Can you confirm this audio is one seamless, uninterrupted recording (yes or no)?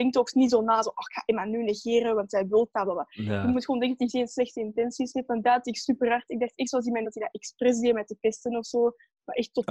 no